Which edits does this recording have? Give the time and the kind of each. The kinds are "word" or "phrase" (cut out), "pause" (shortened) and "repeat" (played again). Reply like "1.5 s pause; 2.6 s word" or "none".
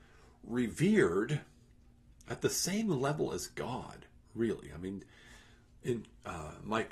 none